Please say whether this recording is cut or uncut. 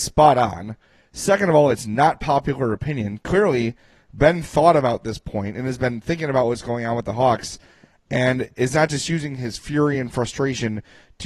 uncut